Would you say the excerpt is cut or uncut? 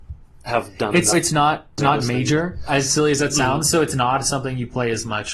cut